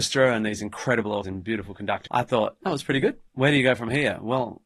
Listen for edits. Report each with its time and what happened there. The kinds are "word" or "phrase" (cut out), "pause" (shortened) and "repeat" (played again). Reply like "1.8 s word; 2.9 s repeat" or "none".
1.2 s word; 2.1 s word; 2.6 s phrase; 3.3 s pause